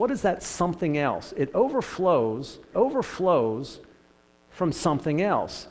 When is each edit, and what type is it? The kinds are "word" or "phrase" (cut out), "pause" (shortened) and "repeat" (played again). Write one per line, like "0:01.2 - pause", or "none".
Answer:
0:02.7 - repeat